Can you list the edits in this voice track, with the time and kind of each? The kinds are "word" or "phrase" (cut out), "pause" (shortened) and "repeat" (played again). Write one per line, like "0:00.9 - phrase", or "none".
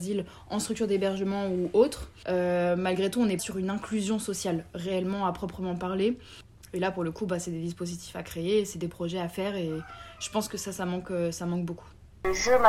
0:03.4 - word
0:08.7 - word